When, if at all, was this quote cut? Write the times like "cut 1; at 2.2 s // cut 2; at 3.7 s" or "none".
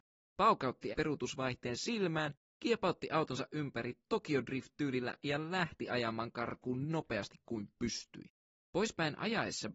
cut 1; at 0.9 s // cut 2; at 6.9 s